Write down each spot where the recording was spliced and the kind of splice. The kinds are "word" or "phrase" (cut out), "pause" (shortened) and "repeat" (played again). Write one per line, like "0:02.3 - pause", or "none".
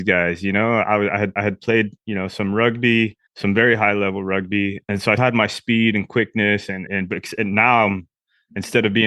0:01.4 - repeat
0:03.3 - pause
0:05.2 - word
0:06.9 - word